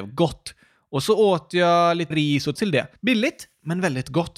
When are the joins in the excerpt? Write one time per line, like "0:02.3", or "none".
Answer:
0:02.1
0:02.6
0:03.0